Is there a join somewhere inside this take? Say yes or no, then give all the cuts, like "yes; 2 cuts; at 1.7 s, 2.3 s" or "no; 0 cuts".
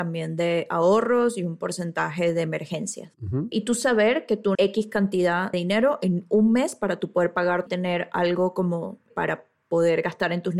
yes; 3 cuts; at 4.5 s, 5.5 s, 7.7 s